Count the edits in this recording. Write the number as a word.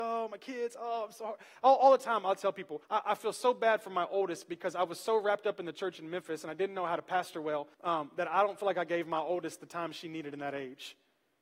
two